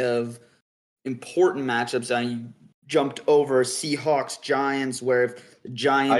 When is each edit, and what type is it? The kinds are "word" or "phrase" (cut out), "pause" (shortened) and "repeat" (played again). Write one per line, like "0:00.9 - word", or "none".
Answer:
none